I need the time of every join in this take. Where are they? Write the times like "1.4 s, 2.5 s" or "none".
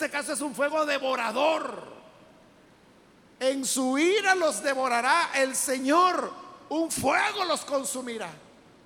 none

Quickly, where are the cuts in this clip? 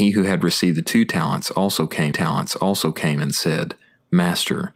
2.1 s

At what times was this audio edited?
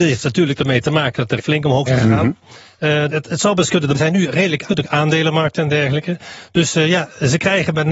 1.4 s, 1.9 s, 3.1 s, 3.9 s, 4.7 s

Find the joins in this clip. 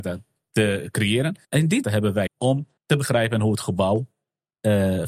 1.4 s, 1.8 s, 2.3 s, 2.8 s

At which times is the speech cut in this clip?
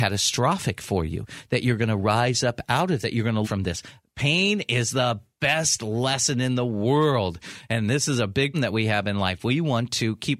3.0 s, 3.4 s, 8.5 s

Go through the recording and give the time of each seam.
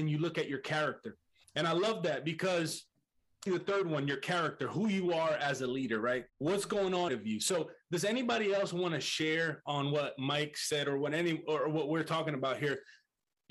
1.4 s, 3.5 s, 6.3 s, 7.1 s

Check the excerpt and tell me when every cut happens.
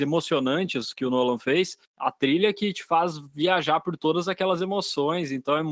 1.8 s

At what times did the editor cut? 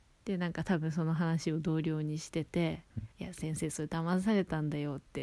3.1 s

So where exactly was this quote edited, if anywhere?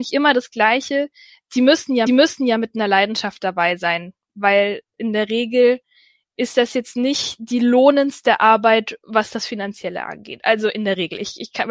2.1 s

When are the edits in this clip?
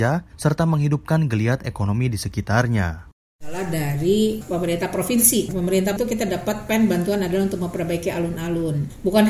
6.0 s

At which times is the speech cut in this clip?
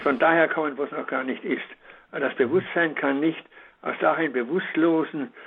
4.0 s

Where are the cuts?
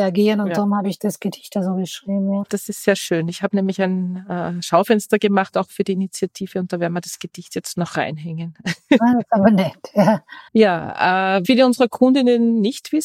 1.0 s, 10.5 s, 11.4 s

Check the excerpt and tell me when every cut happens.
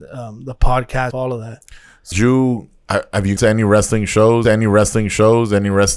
1.1 s, 2.1 s, 3.4 s, 4.4 s

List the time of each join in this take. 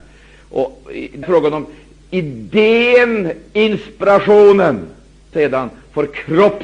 1.2 s, 5.3 s

